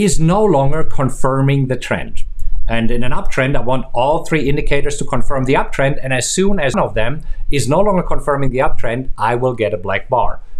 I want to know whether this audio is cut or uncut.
cut